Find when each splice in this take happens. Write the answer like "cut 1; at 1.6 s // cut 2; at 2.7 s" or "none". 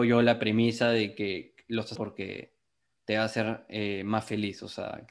cut 1; at 2.0 s